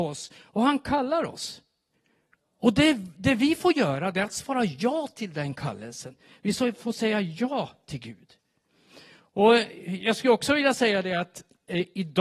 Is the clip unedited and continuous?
yes; 0 cuts

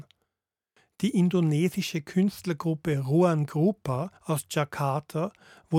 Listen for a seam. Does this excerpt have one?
yes; 1 cut; at 4.2 s

